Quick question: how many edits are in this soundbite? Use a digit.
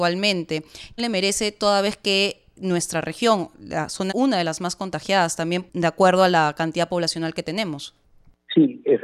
2